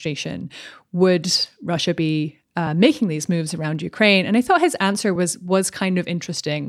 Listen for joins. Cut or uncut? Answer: uncut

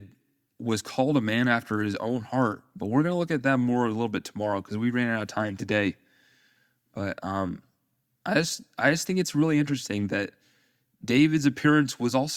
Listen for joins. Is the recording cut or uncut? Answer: uncut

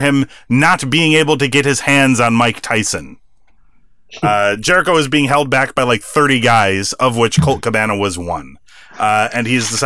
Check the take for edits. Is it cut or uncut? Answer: uncut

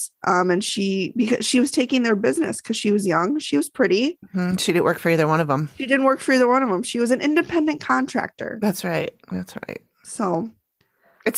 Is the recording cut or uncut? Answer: cut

